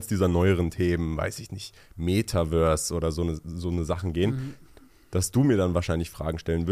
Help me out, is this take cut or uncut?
uncut